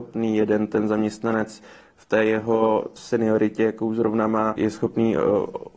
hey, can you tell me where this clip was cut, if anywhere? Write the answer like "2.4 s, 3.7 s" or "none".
3.0 s, 4.6 s